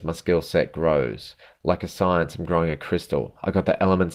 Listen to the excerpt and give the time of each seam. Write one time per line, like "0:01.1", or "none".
none